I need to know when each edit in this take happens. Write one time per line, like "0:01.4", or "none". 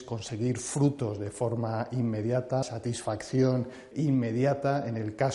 0:02.6
0:03.9